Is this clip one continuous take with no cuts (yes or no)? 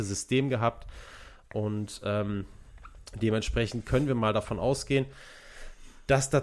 yes